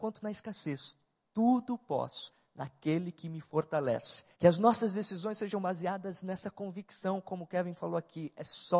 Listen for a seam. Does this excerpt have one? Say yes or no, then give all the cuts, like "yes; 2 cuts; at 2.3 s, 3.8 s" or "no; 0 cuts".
yes; 1 cut; at 4.3 s